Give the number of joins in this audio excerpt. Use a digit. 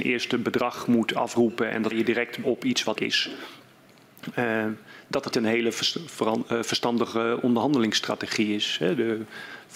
4